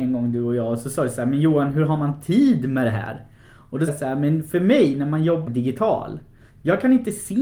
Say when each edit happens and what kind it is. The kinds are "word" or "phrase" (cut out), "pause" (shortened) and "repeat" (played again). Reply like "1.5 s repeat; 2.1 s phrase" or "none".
3.9 s word; 5.5 s word